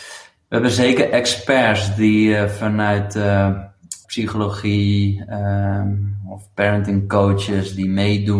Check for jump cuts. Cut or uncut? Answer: cut